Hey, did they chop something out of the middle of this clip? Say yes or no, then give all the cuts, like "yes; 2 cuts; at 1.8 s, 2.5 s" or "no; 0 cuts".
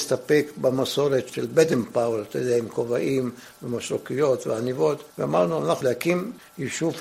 yes; 2 cuts; at 5.1 s, 5.8 s